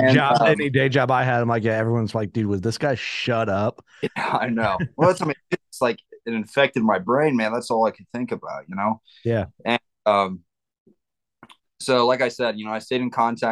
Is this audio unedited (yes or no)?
yes